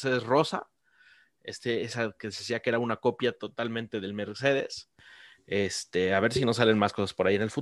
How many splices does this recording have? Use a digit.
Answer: 0